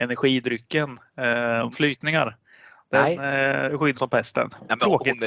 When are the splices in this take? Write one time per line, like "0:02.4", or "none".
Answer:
0:01.7
0:03.9